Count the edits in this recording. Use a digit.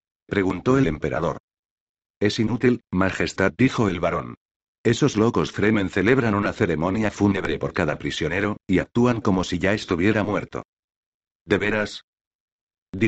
0